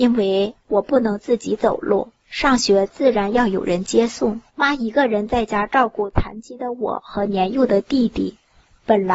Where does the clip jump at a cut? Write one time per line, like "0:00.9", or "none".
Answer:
0:02.2
0:04.5